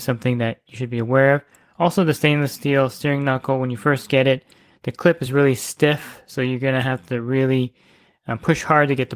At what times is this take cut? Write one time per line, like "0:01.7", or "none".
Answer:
none